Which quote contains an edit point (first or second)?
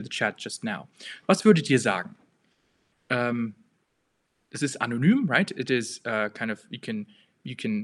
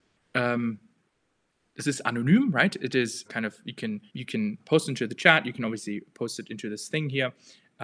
second